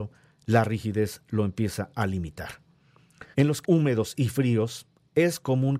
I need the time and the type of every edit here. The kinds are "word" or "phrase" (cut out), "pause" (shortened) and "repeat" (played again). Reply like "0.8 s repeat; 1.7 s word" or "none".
3.3 s pause; 3.6 s word